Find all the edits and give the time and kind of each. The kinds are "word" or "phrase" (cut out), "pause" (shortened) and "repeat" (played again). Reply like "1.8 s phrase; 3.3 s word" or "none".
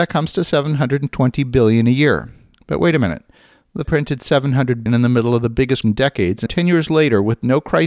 3.8 s word; 4.9 s word; 5.8 s word; 6.5 s word

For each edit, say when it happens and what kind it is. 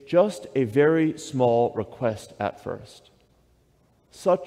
none

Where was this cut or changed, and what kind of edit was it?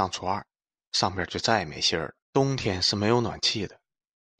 2.2 s pause

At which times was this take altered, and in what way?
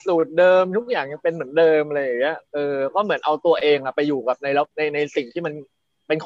2.5 s pause; 4.7 s pause

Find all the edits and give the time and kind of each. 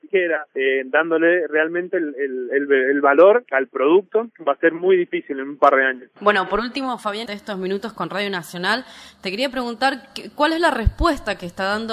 7.3 s word

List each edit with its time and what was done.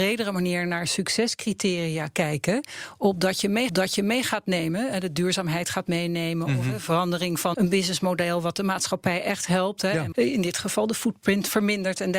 3.7 s repeat; 7.5 s word; 10.1 s phrase

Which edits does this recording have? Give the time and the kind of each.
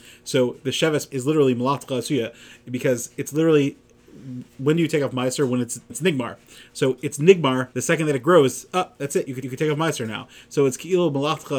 1.1 s word; 4.5 s pause; 5.9 s word; 7.7 s pause; 9.4 s repeat

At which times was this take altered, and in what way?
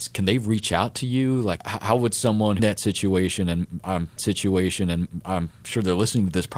1.6 s word; 2.6 s phrase; 4.2 s repeat

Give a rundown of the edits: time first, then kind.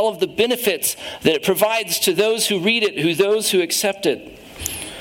none

